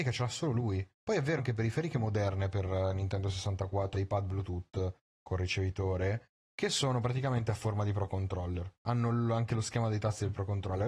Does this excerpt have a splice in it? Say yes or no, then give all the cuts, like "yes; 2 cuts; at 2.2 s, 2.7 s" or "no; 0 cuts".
yes; 3 cuts; at 0.9 s, 1.4 s, 3.9 s